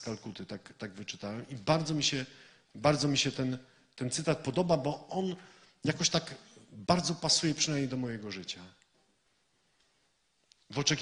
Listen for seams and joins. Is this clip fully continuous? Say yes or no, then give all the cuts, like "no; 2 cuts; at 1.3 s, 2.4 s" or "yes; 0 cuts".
yes; 0 cuts